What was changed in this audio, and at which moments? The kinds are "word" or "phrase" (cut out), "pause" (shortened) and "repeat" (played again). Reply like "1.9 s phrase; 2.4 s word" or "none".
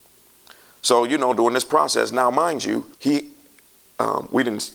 2.9 s pause